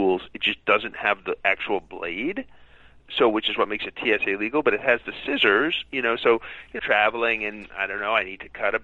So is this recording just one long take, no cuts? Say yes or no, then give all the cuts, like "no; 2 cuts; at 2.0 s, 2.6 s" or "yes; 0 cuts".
no; 1 cut; at 6.8 s